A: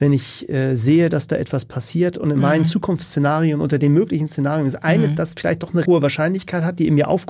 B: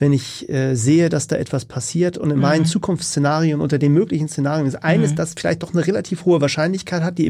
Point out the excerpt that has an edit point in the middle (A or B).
A